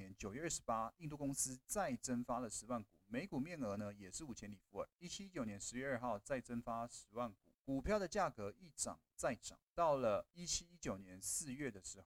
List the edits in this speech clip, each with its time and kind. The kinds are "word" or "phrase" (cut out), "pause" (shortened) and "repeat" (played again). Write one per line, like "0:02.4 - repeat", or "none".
0:07.6 - pause
0:09.7 - pause